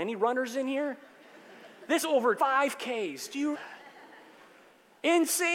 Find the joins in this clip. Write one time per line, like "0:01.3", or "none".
0:02.0
0:02.4
0:03.5